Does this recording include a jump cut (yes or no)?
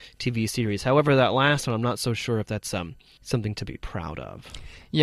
no